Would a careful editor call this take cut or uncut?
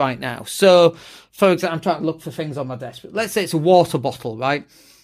uncut